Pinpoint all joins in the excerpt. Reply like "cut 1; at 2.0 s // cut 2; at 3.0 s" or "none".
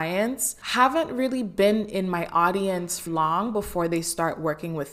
cut 1; at 3.1 s